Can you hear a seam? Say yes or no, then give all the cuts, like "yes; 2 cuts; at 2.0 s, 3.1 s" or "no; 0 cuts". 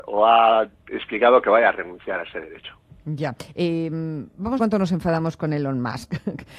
yes; 1 cut; at 4.6 s